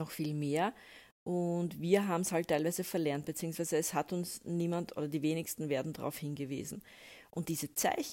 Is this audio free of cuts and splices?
yes; 0 cuts

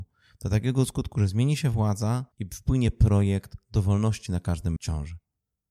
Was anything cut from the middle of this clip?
yes; 3 cuts; at 2.3 s, 4.3 s, 4.8 s

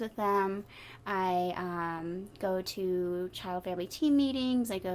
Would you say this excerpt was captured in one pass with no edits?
yes; 0 cuts

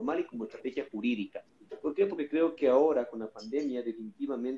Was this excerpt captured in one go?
yes; 0 cuts

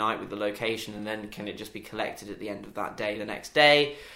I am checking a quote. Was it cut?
no; 0 cuts

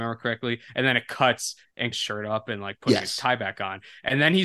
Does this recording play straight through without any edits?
no; 1 cut; at 1.9 s

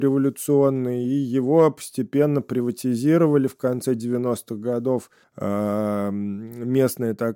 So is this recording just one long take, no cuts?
no; 1 cut; at 5.2 s

